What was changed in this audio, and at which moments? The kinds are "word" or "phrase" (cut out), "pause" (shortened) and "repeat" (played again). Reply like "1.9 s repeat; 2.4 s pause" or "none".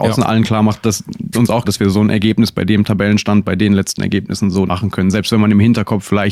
1.3 s word; 1.6 s word; 4.7 s word